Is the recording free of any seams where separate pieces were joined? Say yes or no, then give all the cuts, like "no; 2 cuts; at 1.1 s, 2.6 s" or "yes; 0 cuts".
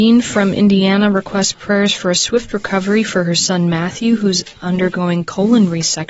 yes; 0 cuts